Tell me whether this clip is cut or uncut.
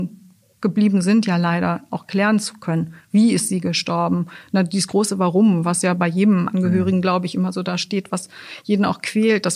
uncut